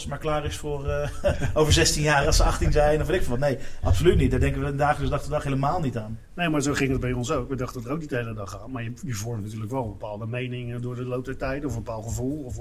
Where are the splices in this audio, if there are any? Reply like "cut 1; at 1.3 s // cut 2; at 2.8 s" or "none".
none